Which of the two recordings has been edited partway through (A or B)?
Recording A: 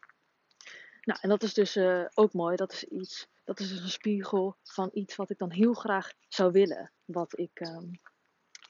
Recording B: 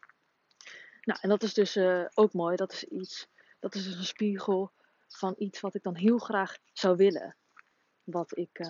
A